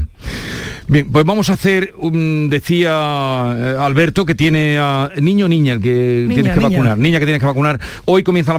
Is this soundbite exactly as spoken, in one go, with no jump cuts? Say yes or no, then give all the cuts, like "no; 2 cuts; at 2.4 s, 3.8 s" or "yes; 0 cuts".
yes; 0 cuts